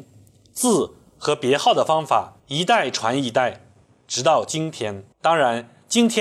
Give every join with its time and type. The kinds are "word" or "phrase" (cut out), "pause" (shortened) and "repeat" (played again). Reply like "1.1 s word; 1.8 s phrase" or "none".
2.4 s pause; 5.1 s pause

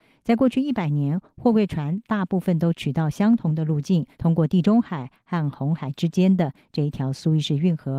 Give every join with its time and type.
4.1 s pause

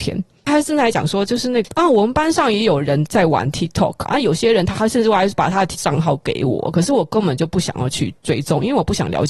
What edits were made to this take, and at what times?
4.0 s word; 5.7 s word

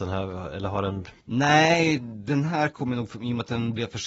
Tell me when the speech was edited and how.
1.2 s pause

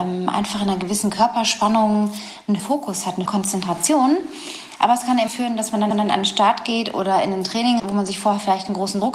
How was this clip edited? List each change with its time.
2.6 s word; 3.3 s word; 5.3 s phrase; 5.9 s repeat; 7.8 s word

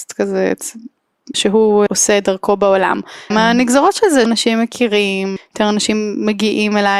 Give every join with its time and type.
1.3 s word; 1.9 s word; 3.3 s word; 4.3 s word; 5.4 s word

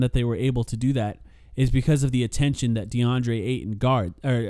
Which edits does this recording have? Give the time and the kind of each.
none

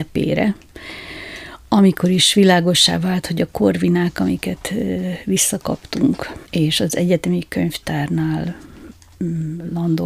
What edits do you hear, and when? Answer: 6.4 s pause

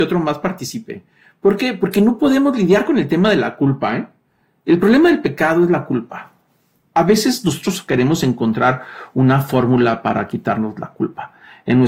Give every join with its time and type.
none

